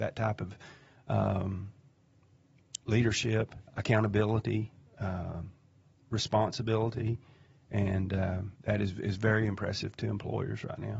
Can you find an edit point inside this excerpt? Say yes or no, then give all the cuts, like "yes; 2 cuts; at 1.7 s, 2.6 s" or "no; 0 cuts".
yes; 2 cuts; at 3.7 s, 8.6 s